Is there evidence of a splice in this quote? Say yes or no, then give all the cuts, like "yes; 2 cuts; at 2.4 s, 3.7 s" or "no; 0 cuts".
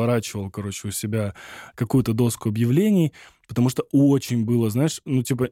no; 0 cuts